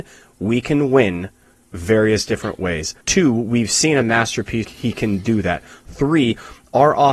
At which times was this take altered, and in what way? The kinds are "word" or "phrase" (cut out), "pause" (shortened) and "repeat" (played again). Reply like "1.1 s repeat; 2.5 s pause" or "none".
3.0 s pause; 4.6 s word